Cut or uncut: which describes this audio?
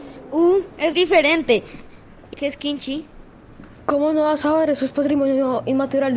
cut